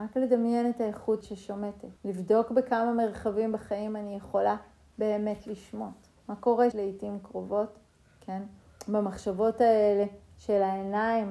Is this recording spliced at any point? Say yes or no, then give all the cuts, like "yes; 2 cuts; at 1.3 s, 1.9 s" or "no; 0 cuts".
yes; 4 cuts; at 1.2 s, 2.0 s, 6.2 s, 6.7 s